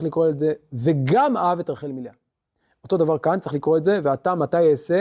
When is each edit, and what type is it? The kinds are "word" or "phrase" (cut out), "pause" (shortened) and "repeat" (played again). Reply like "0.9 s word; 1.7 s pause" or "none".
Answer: none